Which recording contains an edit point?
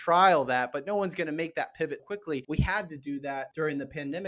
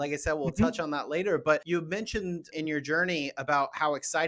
first; 1 cut; at 2.0 s

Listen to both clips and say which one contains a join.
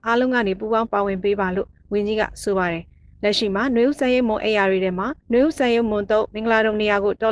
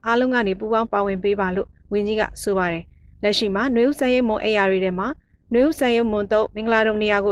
first; 1 cut; at 5.2 s

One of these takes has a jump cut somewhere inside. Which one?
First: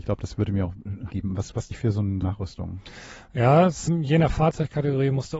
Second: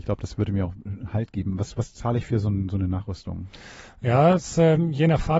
first; 4 cuts; at 1.1 s, 1.7 s, 2.2 s, 3.9 s

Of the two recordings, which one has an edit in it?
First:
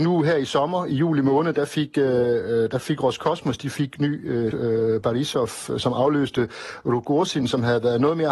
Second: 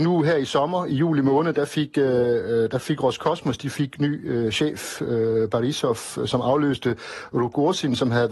first; 1 cut; at 4.5 s

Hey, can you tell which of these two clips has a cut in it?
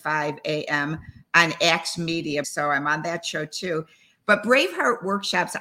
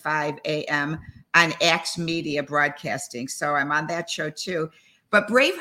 first; 1 cut; at 2.4 s

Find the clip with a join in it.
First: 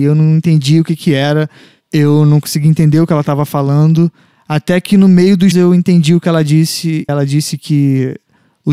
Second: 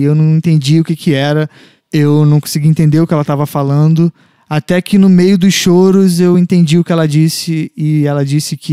first; 2 cuts; at 5.5 s, 7.1 s

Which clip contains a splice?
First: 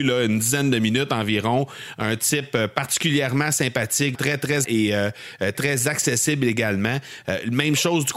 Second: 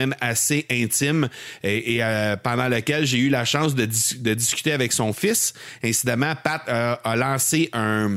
first; 3 cuts; at 4.1 s, 4.6 s, 5.5 s

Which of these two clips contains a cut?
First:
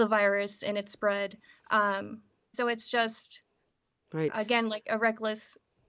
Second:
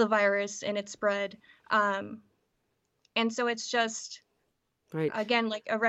first; 1 cut; at 2.5 s

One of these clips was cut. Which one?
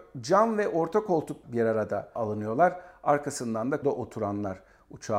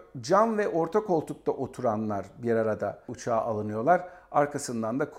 first; 3 cuts; at 1.4 s, 2.2 s, 3.8 s

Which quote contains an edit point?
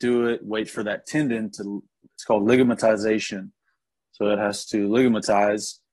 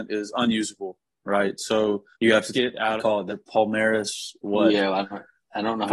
second; 5 cuts; at 2.1 s, 2.5 s, 3.0 s, 3.3 s, 4.4 s

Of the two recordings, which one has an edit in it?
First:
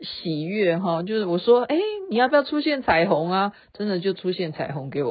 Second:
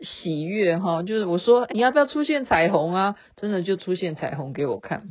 second; 1 cut; at 1.7 s

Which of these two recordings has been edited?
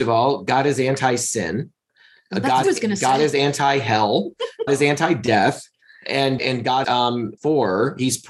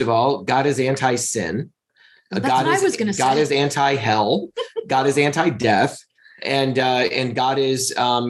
first; 5 cuts; at 2.6 s, 4.7 s, 6.4 s, 6.8 s, 7.4 s

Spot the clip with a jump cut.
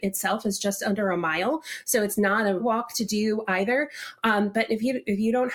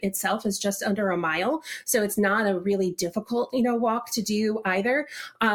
first; 1 cut; at 2.6 s

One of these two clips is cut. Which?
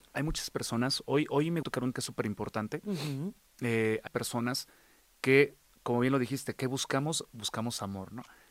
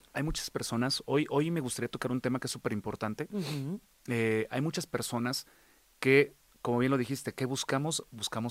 first; 3 cuts; at 1.6 s, 1.9 s, 4.1 s

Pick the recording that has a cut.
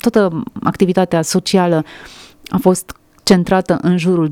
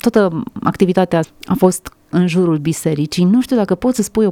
second; 2 cuts; at 1.2 s, 2.1 s

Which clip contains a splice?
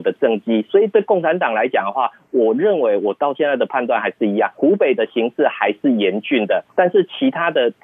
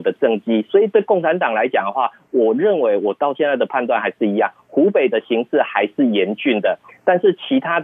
first; 2 cuts; at 4.5 s, 6.7 s

